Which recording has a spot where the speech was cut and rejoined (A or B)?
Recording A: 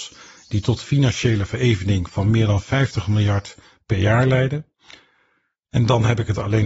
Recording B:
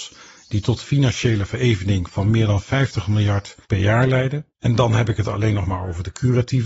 B